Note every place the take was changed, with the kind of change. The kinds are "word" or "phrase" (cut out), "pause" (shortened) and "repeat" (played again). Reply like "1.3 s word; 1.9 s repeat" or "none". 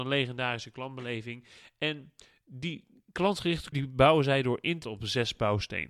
3.7 s word; 4.8 s word